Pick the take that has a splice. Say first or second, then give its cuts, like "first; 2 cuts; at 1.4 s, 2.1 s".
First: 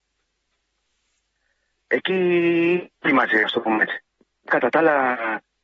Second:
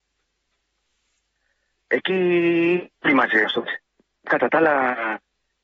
second; 1 cut; at 3.6 s